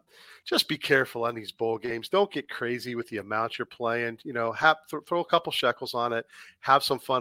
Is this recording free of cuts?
yes; 0 cuts

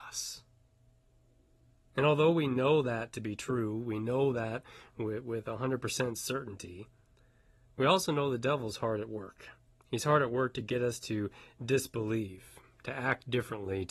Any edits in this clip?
yes; 1 cut; at 9.7 s

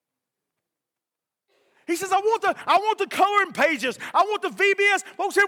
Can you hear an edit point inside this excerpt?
no; 0 cuts

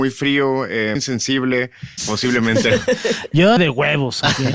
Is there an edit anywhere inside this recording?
yes; 3 cuts; at 1.0 s, 2.0 s, 3.6 s

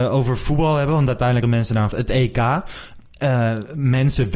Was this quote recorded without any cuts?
no; 2 cuts; at 1.4 s, 1.9 s

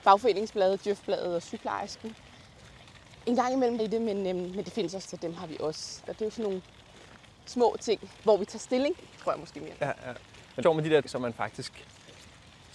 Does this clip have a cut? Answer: yes; 7 cuts; at 3.8 s, 5.0 s, 6.1 s, 8.3 s, 9.7 s, 10.6 s, 11.0 s

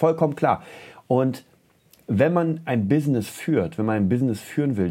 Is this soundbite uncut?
yes; 0 cuts

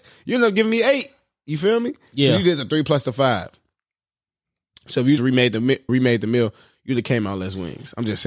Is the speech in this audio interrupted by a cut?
yes; 2 cuts; at 5.2 s, 5.9 s

